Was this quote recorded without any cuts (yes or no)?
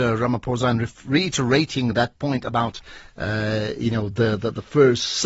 yes